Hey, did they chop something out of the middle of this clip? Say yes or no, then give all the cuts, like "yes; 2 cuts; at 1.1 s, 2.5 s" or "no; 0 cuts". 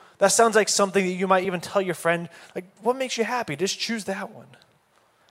no; 0 cuts